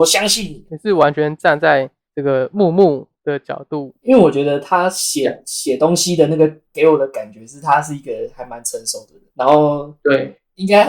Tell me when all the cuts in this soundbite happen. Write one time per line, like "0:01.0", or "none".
0:09.3